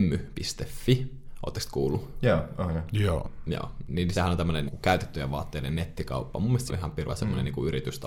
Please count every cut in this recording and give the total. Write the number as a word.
four